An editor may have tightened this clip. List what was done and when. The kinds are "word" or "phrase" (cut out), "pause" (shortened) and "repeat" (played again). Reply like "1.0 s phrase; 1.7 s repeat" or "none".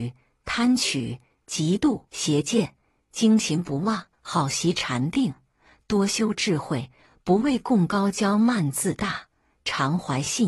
2.1 s pause; 4.1 s pause